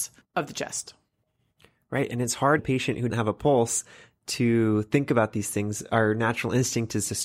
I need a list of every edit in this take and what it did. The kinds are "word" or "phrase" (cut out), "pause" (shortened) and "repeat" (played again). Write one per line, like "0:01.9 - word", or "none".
0:02.6 - word
0:03.1 - word